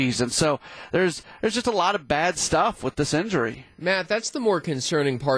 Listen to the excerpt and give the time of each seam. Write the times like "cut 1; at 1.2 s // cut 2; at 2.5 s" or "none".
none